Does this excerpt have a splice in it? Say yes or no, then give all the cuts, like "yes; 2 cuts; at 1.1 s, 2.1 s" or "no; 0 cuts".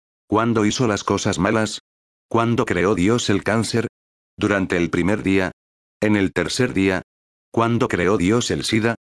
no; 0 cuts